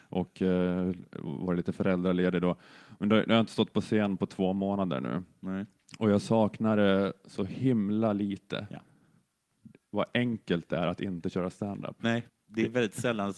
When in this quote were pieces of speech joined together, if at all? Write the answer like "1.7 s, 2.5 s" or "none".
12.3 s

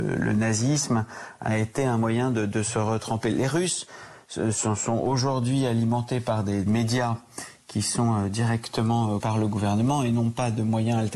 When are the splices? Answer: 6.7 s, 9.2 s

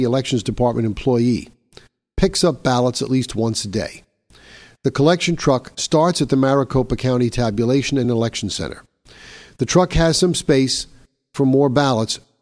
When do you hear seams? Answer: none

